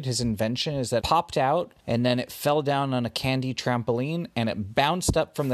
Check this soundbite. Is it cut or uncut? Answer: cut